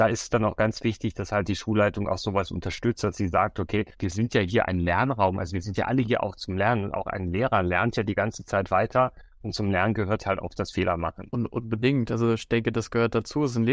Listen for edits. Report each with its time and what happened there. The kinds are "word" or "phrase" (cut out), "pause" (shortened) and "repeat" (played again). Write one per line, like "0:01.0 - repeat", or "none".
0:03.9 - pause

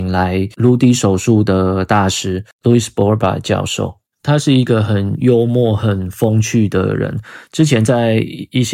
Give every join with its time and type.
none

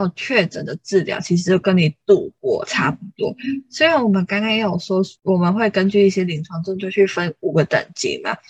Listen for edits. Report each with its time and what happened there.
0:05.2 - pause

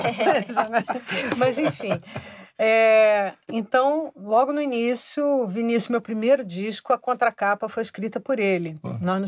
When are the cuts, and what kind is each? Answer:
none

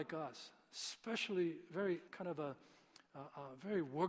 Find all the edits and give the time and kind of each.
0:02.1 - pause

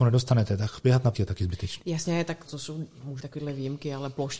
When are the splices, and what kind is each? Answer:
0:01.1 - word
0:02.4 - word
0:03.2 - word

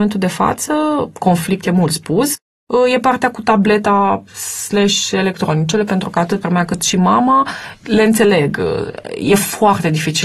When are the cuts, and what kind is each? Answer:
0:06.4 - word

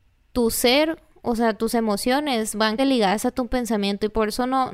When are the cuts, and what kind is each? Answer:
0:01.1 - pause
0:02.8 - word

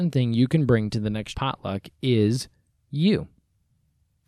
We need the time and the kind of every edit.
0:01.3 - word

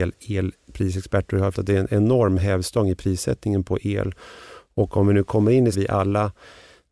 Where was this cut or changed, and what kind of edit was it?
0:01.5 - word
0:05.7 - phrase

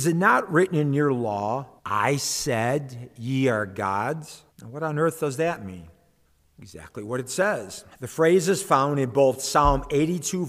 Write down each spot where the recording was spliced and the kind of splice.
0:01.8 - pause
0:04.5 - pause
0:06.3 - pause
0:07.9 - pause

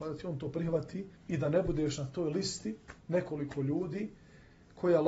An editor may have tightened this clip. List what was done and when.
0:01.2 - pause
0:03.0 - pause

